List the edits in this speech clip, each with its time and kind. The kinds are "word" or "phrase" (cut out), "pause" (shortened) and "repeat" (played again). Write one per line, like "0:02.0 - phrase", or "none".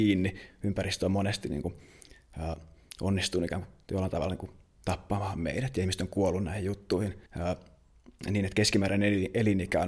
0:07.3 - pause